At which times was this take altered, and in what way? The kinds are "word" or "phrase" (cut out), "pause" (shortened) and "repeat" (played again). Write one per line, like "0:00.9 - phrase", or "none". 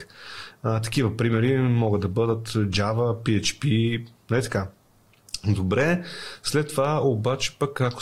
none